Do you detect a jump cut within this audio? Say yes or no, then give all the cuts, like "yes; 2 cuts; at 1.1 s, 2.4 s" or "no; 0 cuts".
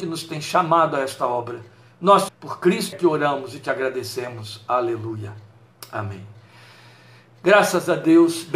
yes; 2 cuts; at 2.3 s, 2.9 s